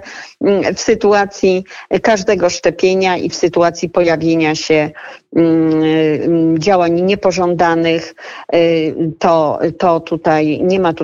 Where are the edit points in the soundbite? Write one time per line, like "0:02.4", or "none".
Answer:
none